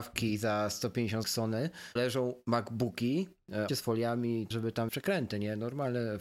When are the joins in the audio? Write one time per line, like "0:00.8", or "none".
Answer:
0:01.2
0:02.0
0:03.7
0:04.5
0:04.9